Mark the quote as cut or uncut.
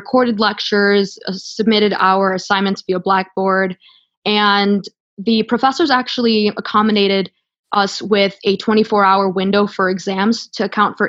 uncut